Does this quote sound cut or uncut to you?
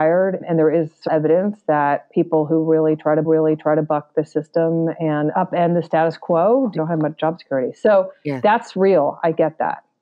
cut